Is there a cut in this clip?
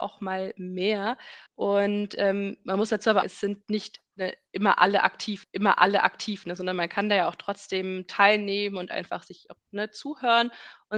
yes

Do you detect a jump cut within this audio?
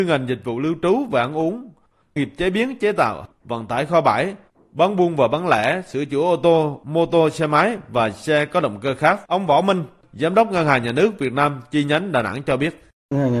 yes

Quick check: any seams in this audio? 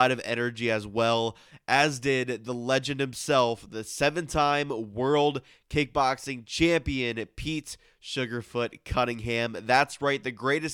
no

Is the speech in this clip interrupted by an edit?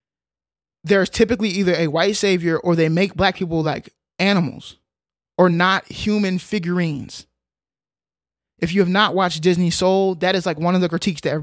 no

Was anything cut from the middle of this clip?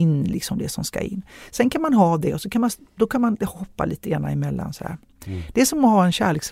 no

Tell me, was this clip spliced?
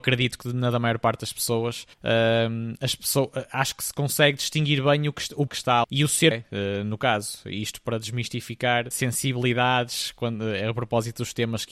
yes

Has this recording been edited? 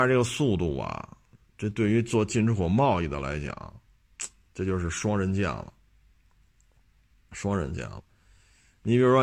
yes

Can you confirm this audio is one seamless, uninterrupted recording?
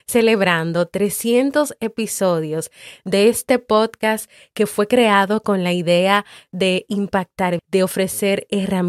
no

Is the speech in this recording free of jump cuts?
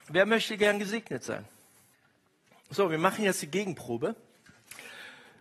yes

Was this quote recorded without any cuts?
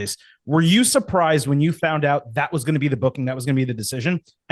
yes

